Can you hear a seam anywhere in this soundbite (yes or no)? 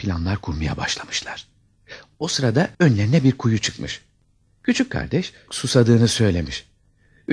yes